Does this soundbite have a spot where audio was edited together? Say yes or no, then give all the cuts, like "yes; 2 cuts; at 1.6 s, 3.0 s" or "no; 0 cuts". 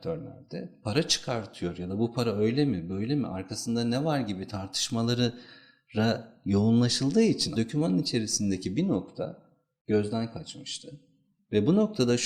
yes; 1 cut; at 7.5 s